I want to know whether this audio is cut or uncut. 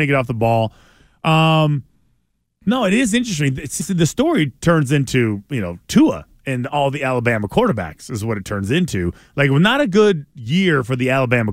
cut